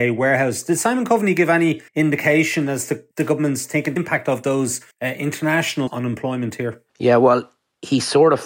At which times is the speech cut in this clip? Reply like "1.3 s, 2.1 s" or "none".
1.9 s, 3.1 s, 4.0 s, 4.9 s, 5.9 s, 6.9 s

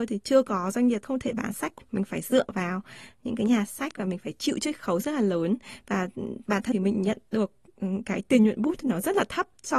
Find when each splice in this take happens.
1.0 s, 1.8 s, 6.7 s

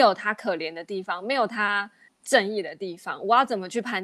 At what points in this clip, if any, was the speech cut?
2.1 s

